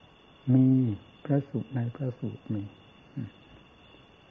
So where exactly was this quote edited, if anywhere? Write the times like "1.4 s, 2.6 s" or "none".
1.1 s